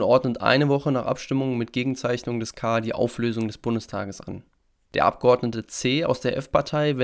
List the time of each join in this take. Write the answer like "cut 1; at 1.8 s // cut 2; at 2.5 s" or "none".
none